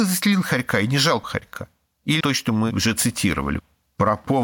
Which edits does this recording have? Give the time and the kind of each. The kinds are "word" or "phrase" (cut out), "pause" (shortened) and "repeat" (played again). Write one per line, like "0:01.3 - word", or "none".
0:01.2 - word
0:02.2 - word